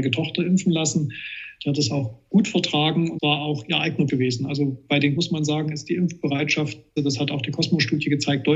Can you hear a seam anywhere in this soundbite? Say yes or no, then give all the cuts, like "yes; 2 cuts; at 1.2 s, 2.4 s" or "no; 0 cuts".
yes; 4 cuts; at 3.2 s, 4.1 s, 5.2 s, 7.0 s